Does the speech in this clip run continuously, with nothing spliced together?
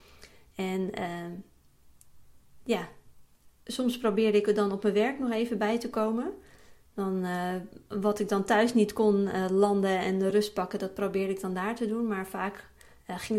yes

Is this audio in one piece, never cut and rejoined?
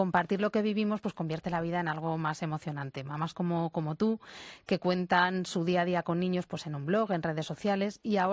yes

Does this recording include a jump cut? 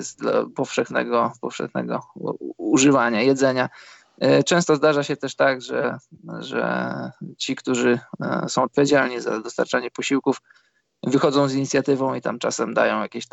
no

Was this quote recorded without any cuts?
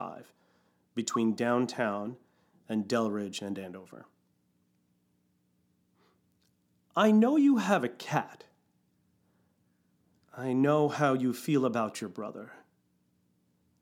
yes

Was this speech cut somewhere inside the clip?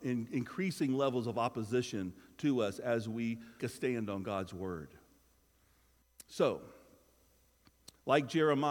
yes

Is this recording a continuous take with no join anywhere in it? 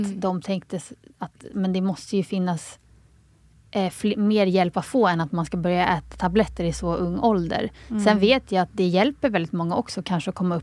yes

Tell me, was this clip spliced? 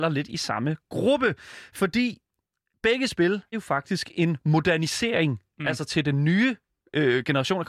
yes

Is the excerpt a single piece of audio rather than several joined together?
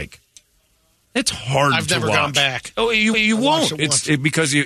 no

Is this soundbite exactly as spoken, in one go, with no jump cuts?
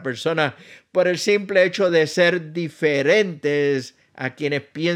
yes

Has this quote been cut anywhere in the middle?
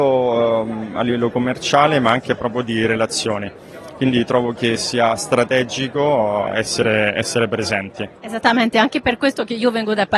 yes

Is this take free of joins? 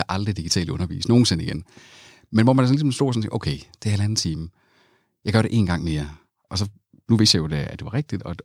yes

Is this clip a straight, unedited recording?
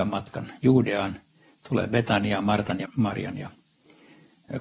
no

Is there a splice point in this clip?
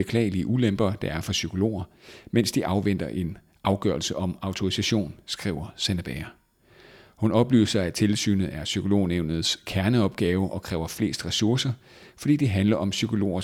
no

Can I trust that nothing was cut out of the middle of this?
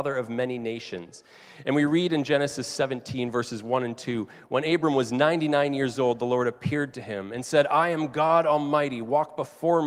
yes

